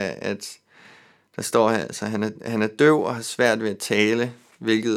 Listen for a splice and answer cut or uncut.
uncut